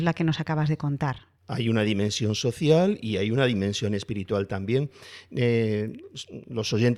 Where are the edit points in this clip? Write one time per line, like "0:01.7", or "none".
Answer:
0:01.4